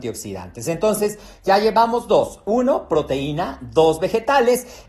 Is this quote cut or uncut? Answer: uncut